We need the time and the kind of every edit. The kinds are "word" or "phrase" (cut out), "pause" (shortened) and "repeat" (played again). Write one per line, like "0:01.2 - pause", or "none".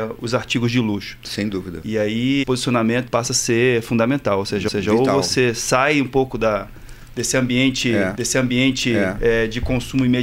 0:02.4 - word
0:03.1 - word
0:04.7 - repeat
0:08.1 - repeat